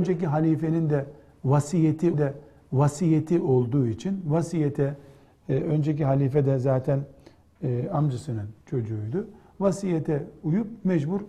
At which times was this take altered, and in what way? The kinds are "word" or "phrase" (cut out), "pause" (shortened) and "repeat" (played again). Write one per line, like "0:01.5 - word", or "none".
0:02.1 - repeat
0:08.6 - pause